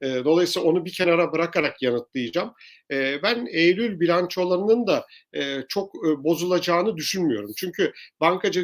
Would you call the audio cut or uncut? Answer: uncut